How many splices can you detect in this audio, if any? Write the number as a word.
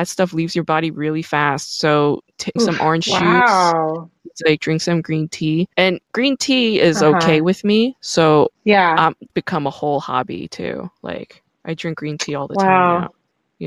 four